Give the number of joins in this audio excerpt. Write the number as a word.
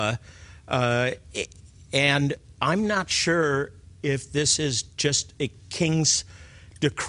zero